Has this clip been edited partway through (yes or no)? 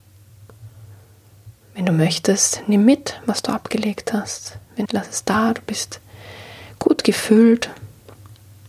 yes